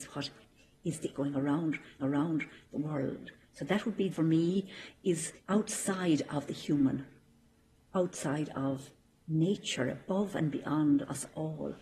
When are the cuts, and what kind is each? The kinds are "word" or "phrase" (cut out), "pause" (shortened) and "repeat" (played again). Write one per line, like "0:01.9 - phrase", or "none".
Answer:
0:01.1 - phrase
0:02.0 - repeat
0:03.5 - pause
0:04.1 - phrase
0:05.4 - pause
0:07.4 - pause